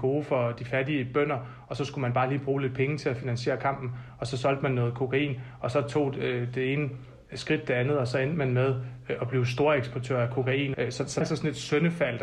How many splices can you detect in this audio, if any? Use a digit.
1